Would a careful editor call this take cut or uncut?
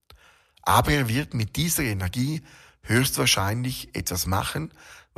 uncut